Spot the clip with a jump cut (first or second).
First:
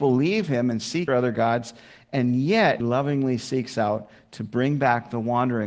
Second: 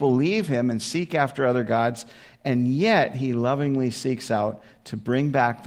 first